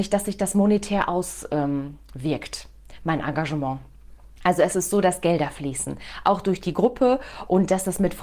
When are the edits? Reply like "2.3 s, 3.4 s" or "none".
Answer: 4.3 s